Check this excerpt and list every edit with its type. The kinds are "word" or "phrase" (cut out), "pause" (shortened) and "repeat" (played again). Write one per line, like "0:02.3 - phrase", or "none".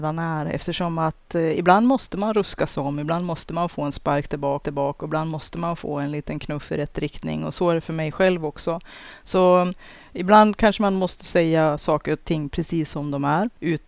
0:04.6 - repeat